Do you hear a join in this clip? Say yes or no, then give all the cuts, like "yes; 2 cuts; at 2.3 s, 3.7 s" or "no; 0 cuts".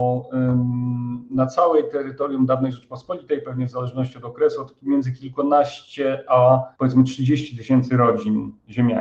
yes; 1 cut; at 6.7 s